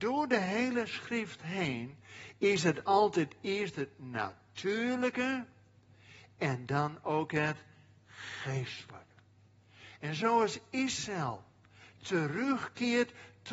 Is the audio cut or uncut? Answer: uncut